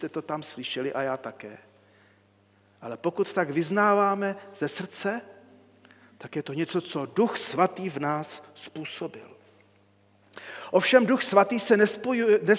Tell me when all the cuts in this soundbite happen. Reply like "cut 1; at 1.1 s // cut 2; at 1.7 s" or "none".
none

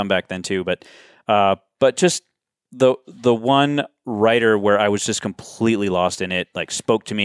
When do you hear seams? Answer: none

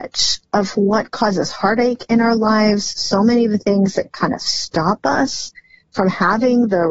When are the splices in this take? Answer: none

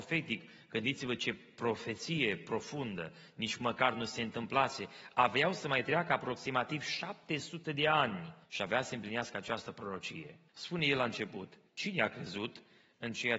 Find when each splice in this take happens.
cut 1; at 8.4 s // cut 2; at 10.5 s // cut 3; at 11.7 s

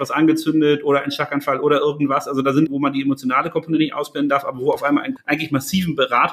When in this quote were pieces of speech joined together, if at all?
cut 1; at 2.7 s // cut 2; at 5.2 s

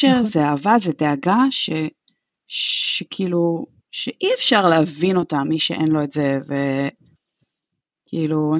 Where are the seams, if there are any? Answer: none

